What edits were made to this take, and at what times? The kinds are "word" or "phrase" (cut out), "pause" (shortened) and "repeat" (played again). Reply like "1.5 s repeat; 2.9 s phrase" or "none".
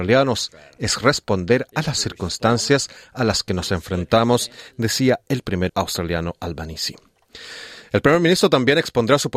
5.7 s word